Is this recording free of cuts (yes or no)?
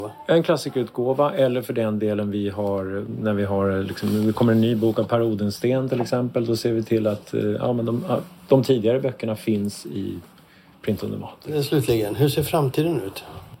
yes